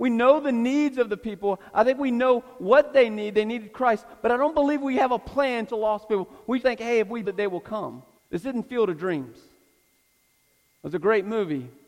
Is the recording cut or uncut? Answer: cut